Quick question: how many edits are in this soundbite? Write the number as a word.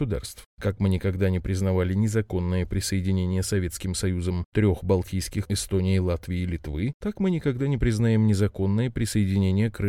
one